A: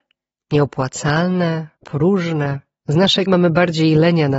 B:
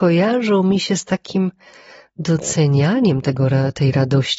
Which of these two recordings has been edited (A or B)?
A